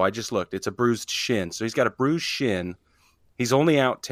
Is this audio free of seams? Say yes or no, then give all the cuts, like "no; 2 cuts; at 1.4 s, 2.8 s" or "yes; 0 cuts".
yes; 0 cuts